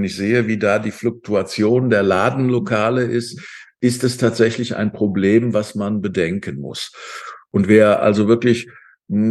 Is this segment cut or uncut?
uncut